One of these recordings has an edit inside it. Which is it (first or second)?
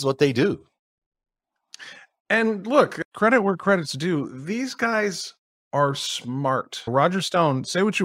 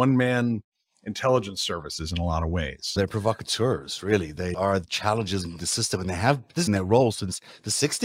second